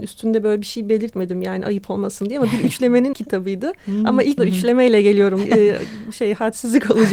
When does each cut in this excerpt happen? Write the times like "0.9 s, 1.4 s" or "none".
3.1 s, 4.4 s, 5.4 s